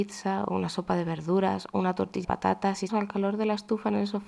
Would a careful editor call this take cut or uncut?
cut